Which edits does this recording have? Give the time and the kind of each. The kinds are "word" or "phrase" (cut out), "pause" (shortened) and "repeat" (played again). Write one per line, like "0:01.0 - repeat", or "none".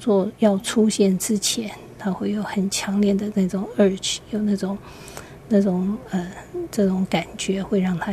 none